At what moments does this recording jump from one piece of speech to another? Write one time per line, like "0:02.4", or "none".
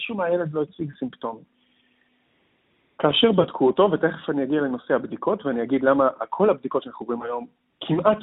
none